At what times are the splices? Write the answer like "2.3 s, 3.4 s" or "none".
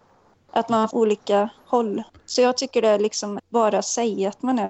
0.9 s, 2.1 s, 3.4 s